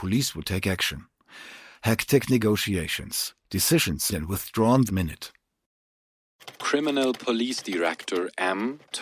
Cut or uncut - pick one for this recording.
cut